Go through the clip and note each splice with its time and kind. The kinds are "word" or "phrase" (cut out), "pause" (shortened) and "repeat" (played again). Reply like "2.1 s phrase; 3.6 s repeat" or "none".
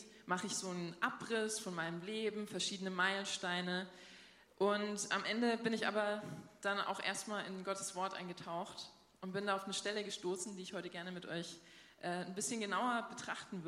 none